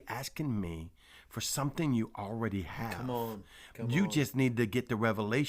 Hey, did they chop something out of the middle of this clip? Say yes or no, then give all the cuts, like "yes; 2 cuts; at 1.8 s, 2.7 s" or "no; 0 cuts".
no; 0 cuts